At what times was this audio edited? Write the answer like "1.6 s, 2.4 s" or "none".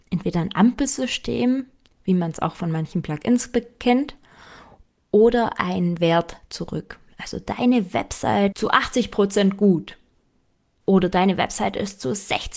8.5 s